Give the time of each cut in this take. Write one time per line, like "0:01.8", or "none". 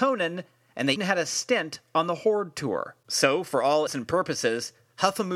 0:01.0
0:03.0
0:03.9